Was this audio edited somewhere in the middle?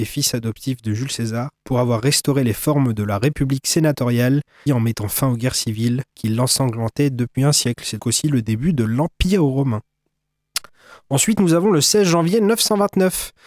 yes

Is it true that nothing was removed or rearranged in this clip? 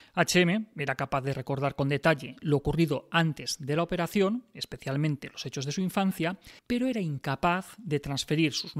no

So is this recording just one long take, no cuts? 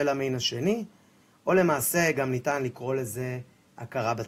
yes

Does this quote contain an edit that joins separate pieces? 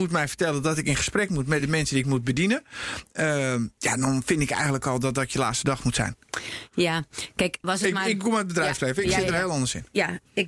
no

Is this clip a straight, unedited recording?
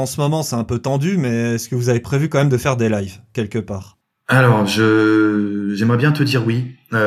yes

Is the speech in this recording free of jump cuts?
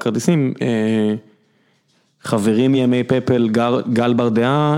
yes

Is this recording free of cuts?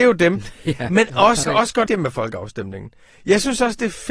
no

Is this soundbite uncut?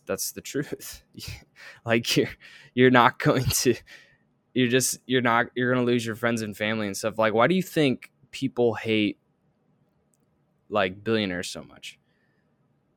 yes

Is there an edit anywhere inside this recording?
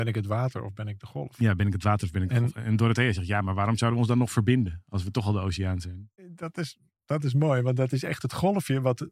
yes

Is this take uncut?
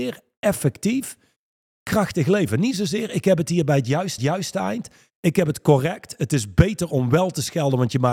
no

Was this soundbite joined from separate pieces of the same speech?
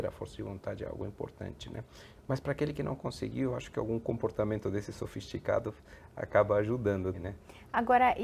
yes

